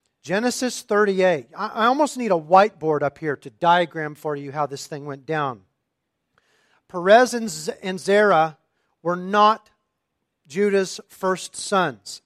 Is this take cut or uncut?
uncut